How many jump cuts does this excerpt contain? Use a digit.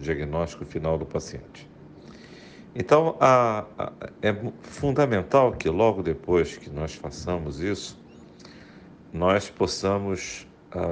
0